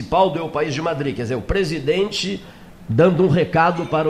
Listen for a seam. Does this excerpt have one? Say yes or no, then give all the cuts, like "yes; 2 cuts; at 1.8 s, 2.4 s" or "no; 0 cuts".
no; 0 cuts